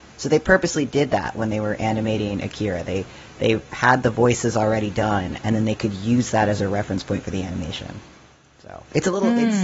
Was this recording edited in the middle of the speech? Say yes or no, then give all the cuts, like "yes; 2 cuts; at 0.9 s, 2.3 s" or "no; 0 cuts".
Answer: no; 0 cuts